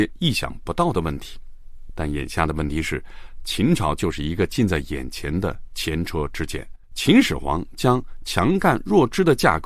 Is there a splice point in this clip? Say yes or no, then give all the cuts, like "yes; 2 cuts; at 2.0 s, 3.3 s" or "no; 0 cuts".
yes; 1 cut; at 6.8 s